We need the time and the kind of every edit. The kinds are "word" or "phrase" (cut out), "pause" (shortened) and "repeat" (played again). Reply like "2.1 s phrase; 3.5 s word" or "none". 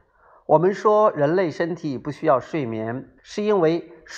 3.2 s pause